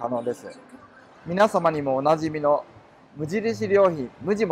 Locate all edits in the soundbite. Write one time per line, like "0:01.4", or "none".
none

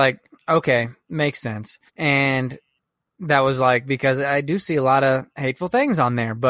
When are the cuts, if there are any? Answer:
0:01.9
0:05.3

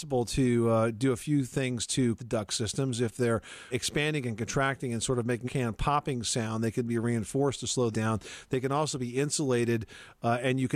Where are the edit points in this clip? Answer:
0:02.2
0:03.7
0:05.4
0:07.9

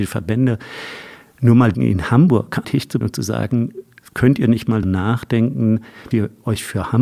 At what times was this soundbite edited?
0:01.7
0:02.6
0:03.0
0:04.8
0:06.1

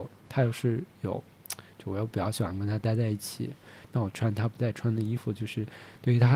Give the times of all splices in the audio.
0:00.9

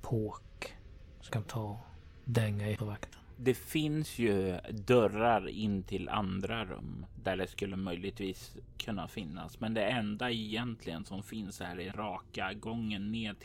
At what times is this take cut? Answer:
0:01.3
0:02.8
0:11.9

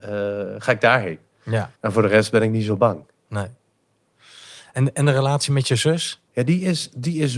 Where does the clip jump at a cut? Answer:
0:01.8
0:06.3

